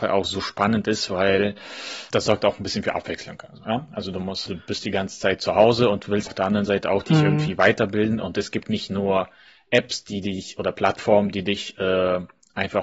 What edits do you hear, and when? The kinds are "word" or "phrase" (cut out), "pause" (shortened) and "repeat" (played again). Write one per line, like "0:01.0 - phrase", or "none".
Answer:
0:02.1 - word
0:04.5 - word
0:06.3 - word
0:08.6 - word